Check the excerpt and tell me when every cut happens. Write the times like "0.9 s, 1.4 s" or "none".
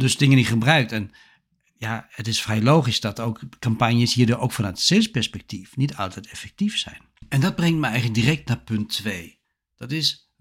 none